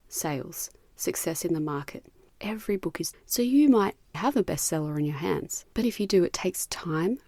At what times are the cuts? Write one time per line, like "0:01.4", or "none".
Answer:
0:03.1
0:04.1
0:05.8